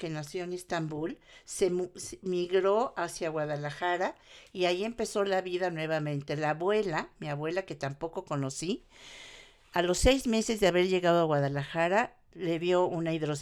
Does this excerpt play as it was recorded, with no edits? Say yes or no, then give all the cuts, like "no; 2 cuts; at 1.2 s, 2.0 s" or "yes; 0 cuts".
yes; 0 cuts